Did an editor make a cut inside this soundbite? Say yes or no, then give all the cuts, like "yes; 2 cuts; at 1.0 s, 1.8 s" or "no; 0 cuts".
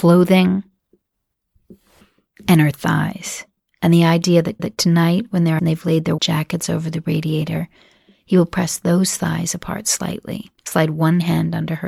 yes; 5 cuts; at 3.6 s, 4.6 s, 5.6 s, 6.2 s, 10.6 s